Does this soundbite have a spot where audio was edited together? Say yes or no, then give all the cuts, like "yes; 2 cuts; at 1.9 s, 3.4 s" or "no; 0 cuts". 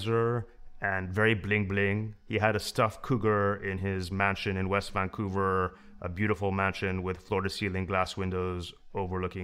no; 0 cuts